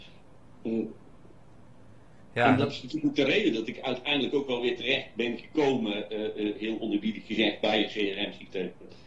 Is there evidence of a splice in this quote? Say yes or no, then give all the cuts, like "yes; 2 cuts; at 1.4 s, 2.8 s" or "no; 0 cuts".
no; 0 cuts